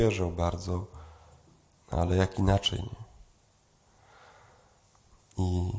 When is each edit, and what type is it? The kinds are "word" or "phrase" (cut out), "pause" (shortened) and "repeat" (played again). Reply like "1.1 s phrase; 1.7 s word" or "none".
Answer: none